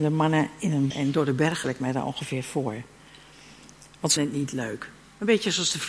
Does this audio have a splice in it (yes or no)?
yes